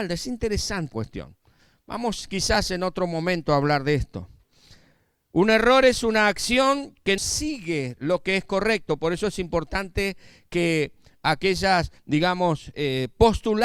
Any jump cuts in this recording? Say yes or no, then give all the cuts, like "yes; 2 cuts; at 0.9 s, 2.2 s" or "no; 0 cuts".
yes; 3 cuts; at 0.9 s, 7.2 s, 12.0 s